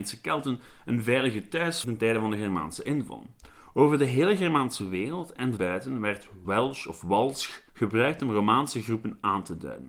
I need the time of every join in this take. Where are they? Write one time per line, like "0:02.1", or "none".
0:01.8
0:05.6
0:06.4
0:07.7